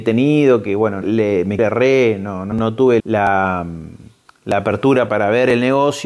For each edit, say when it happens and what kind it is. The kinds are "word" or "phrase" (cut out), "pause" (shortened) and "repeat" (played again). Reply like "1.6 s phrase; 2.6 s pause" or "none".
1.0 s word; 1.6 s word; 2.5 s word; 3.0 s word; 5.1 s word